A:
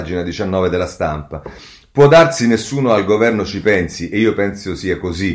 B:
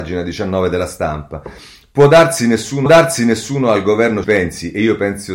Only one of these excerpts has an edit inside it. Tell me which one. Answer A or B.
B